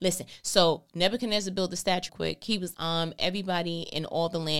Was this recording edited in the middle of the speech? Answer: yes; 2 cuts; at 2.1 s, 2.7 s

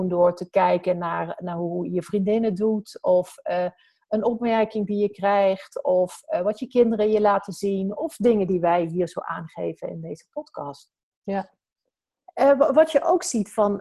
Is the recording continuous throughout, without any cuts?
yes; 0 cuts

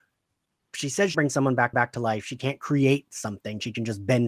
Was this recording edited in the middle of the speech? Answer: yes; 2 cuts; at 1.1 s, 1.7 s

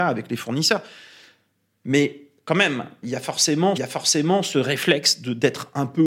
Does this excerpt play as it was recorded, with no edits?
no; 2 cuts; at 3.0 s, 3.8 s

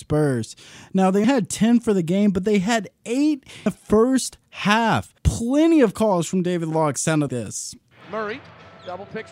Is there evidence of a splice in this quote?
yes; 3 cuts; at 1.2 s, 3.7 s, 7.3 s

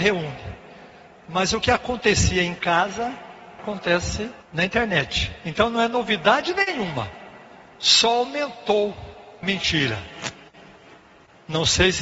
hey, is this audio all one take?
no; 3 cuts; at 3.6 s, 4.4 s, 9.4 s

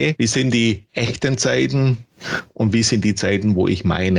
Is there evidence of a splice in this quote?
no; 0 cuts

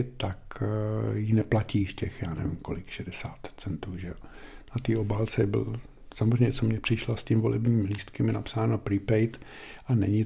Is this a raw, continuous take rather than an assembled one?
yes; 0 cuts

